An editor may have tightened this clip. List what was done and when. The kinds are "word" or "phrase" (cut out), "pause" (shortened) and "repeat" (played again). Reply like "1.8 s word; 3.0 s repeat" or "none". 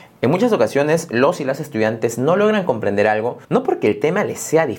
3.4 s pause